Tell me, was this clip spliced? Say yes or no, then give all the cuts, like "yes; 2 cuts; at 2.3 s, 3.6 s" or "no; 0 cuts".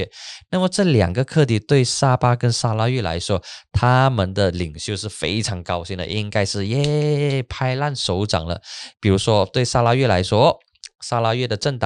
yes; 1 cut; at 8.9 s